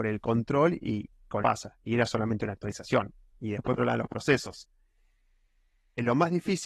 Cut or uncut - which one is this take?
cut